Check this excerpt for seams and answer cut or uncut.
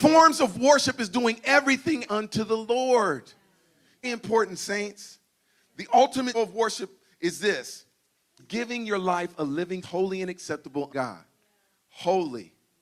cut